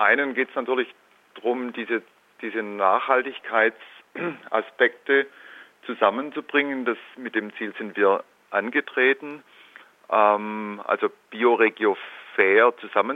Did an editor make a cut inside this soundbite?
no; 0 cuts

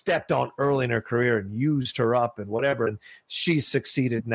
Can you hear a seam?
no; 0 cuts

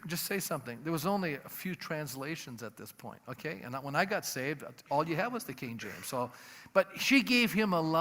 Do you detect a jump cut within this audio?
no; 0 cuts

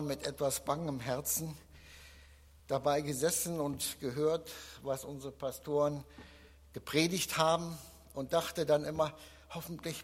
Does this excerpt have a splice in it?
no; 0 cuts

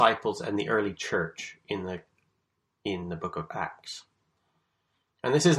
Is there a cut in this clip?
no; 0 cuts

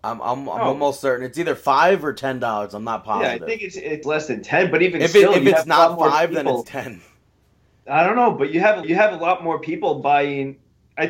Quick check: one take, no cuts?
no; 3 cuts; at 4.0 s, 6.6 s, 8.8 s

